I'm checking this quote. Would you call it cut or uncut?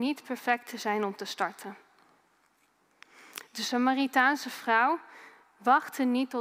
uncut